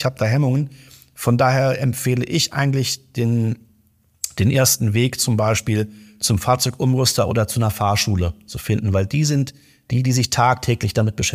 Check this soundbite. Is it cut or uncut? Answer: uncut